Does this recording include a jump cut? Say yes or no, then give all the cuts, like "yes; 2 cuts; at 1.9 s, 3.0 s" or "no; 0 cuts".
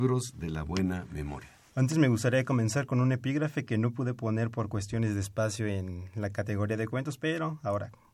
no; 0 cuts